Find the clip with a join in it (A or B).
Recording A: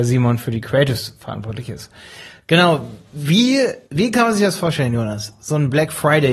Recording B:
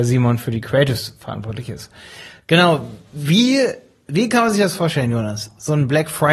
A